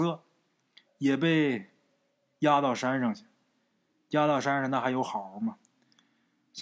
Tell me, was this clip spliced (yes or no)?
no